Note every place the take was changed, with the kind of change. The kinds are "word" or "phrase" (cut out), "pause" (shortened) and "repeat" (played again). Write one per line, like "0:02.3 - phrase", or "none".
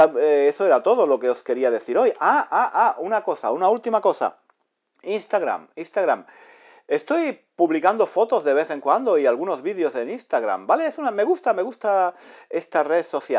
none